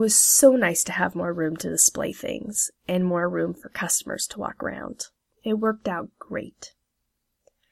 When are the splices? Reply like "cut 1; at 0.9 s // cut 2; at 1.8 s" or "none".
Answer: none